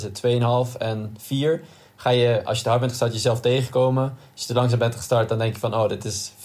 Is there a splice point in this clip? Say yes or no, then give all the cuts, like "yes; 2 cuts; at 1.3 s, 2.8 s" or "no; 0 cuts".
no; 0 cuts